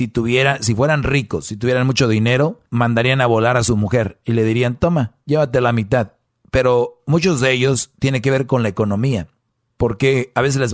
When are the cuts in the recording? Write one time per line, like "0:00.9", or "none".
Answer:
0:02.7
0:06.3